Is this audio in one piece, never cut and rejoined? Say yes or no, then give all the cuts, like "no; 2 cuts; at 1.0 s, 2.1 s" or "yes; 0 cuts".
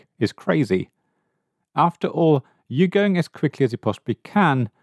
yes; 0 cuts